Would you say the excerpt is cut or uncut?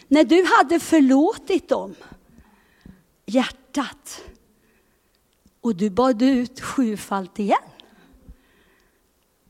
cut